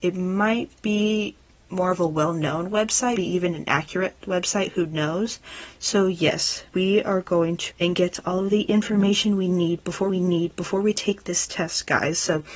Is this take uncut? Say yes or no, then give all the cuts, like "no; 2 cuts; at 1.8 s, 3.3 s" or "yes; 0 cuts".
no; 5 cuts; at 1.5 s, 3.2 s, 6.7 s, 7.7 s, 10.1 s